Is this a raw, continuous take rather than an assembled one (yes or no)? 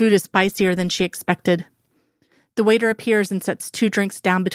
yes